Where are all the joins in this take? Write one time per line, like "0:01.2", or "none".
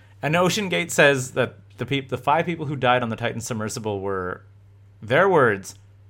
none